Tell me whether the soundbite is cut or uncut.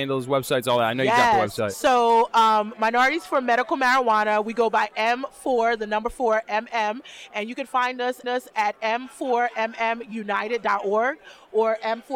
cut